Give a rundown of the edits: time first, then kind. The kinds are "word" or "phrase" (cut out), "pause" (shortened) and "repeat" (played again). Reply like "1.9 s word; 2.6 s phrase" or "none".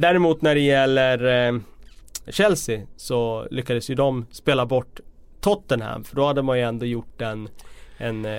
2.3 s word